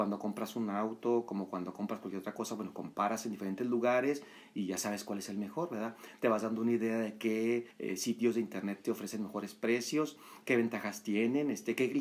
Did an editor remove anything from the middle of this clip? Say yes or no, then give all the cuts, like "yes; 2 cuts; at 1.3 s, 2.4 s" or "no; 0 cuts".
yes; 1 cut; at 7.7 s